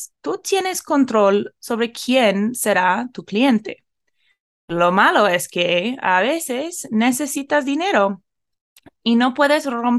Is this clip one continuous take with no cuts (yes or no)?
yes